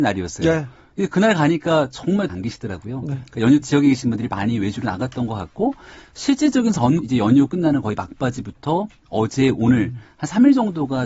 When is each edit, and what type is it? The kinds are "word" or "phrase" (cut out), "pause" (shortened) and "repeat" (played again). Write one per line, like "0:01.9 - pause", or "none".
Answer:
0:02.3 - phrase
0:03.6 - word
0:07.0 - word